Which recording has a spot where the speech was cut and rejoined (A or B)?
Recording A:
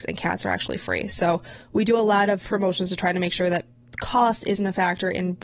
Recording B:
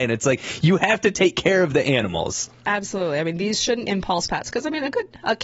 B